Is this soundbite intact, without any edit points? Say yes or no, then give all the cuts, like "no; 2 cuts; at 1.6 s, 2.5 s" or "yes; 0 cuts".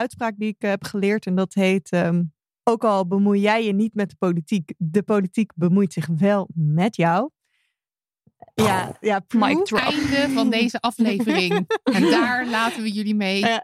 yes; 0 cuts